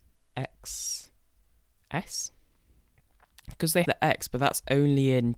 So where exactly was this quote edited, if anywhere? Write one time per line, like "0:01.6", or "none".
0:03.8